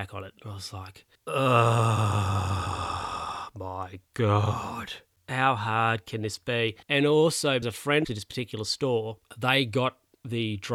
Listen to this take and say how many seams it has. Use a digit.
5